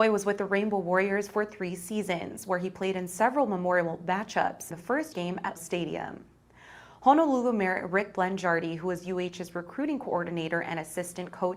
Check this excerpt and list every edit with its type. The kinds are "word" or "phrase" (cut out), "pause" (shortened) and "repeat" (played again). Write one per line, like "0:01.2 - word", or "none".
0:04.7 - word
0:05.1 - word
0:05.6 - word